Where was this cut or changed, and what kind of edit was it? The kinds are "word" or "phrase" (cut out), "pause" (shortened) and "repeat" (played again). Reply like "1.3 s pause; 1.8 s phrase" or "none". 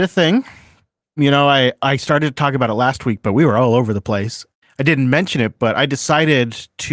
none